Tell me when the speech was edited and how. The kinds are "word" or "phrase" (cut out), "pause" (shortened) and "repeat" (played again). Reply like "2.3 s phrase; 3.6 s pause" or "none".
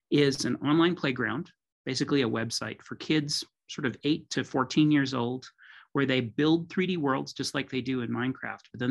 none